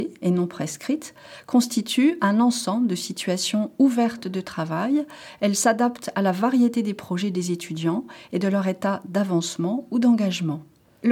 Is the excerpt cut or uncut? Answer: uncut